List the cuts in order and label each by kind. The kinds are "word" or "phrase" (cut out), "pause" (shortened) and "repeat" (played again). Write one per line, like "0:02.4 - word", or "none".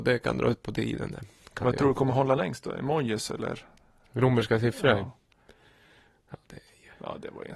none